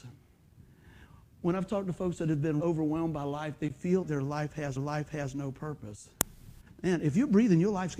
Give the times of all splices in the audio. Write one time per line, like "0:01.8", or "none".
0:02.6
0:04.0
0:04.8
0:06.7